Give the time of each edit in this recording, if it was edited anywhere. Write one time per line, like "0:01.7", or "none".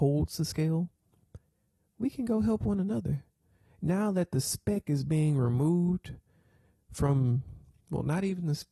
none

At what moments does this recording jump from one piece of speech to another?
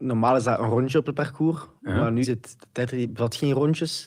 0:02.2

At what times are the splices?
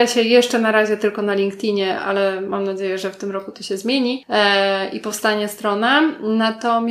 none

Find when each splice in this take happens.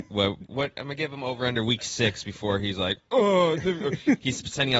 none

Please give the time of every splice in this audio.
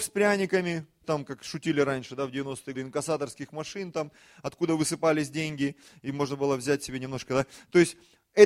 0:01.0
0:02.7

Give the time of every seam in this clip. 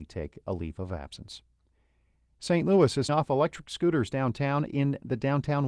0:03.1
0:04.7

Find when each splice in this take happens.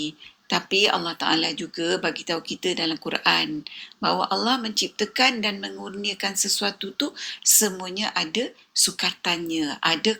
none

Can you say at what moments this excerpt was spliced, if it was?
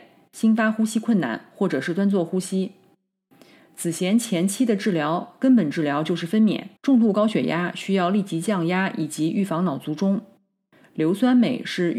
0:06.8

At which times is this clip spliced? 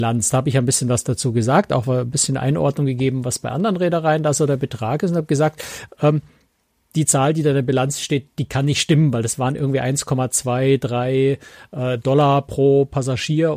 none

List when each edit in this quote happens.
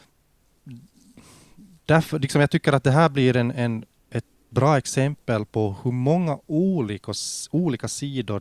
none

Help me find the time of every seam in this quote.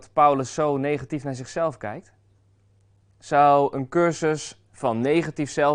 none

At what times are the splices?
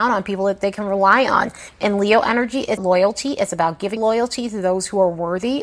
0:02.8
0:04.0

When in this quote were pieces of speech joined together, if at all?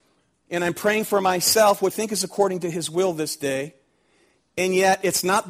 0:01.9

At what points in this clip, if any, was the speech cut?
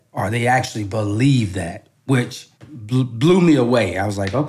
0:02.6

